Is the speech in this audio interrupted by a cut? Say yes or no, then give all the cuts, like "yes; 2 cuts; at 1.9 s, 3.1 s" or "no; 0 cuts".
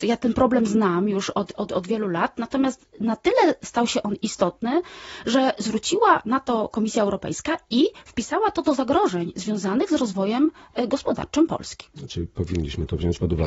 no; 0 cuts